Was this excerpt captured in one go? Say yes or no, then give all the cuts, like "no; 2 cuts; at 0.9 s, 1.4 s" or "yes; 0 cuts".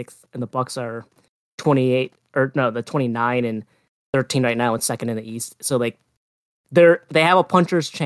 yes; 0 cuts